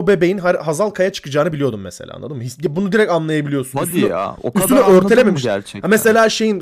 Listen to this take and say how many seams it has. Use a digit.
0